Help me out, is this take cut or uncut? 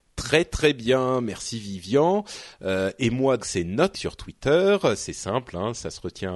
cut